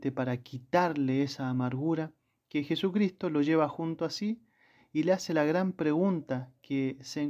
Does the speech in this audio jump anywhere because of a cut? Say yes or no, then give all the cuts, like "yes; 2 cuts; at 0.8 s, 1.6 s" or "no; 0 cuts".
no; 0 cuts